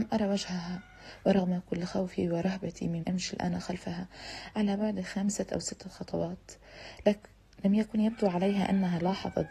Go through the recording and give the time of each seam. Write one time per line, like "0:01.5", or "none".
0:03.0